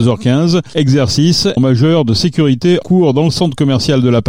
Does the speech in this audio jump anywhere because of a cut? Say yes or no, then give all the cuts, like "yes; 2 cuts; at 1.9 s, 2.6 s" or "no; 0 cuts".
yes; 2 cuts; at 1.6 s, 2.8 s